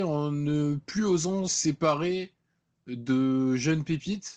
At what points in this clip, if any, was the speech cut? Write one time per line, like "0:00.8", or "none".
0:01.5

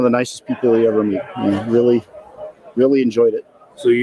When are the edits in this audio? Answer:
none

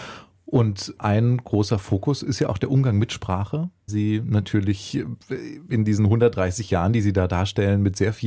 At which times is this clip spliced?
0:03.9

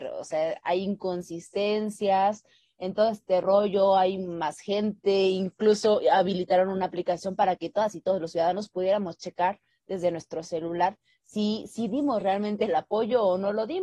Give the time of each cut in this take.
none

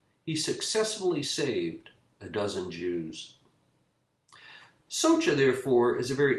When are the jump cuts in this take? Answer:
none

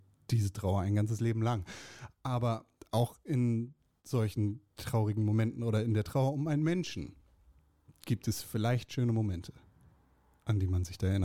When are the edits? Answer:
none

